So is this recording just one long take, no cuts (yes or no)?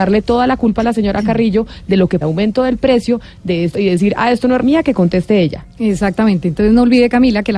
no